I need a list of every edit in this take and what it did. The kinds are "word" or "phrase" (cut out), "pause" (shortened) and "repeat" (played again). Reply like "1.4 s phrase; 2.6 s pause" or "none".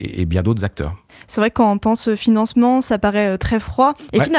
none